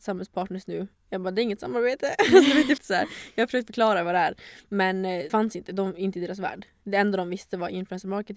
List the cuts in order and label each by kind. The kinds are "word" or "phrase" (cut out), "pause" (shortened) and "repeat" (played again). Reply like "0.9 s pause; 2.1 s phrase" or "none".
2.8 s word; 5.3 s word